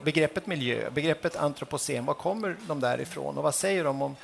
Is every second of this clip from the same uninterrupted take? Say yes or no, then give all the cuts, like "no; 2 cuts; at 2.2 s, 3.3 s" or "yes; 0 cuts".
yes; 0 cuts